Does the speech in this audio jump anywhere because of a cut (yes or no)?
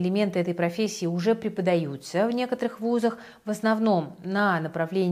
no